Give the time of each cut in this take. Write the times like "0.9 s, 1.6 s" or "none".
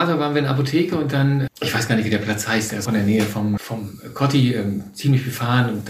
1.5 s, 2.9 s, 3.6 s